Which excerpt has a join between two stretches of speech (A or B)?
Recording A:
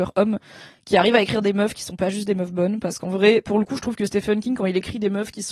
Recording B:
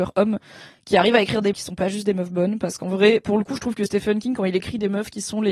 B